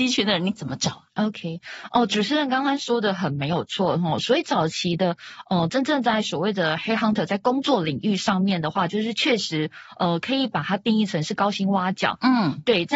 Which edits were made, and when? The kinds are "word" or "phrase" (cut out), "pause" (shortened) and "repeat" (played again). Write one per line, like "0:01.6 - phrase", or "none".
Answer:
0:01.1 - pause